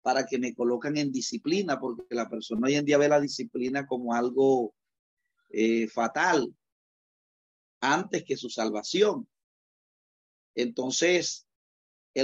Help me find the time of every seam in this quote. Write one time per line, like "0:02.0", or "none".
none

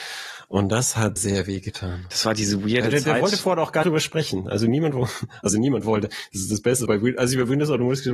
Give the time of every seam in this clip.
0:01.2
0:03.8
0:06.9

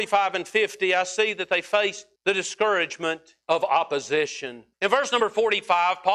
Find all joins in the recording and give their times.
0:02.2
0:03.4
0:04.7

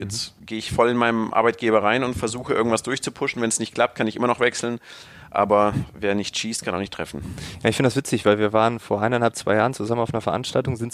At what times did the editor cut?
none

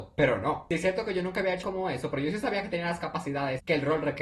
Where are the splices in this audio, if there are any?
0:01.6

